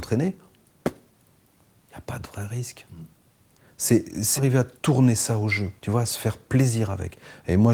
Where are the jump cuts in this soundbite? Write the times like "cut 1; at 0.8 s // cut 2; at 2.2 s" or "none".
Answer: cut 1; at 4.4 s // cut 2; at 4.8 s // cut 3; at 5.8 s